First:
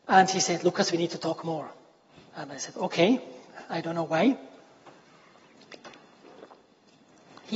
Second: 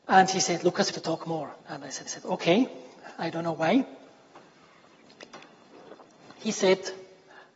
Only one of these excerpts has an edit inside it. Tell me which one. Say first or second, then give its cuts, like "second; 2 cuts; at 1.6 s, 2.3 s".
second; 4 cuts; at 0.9 s, 1.6 s, 2.1 s, 6.0 s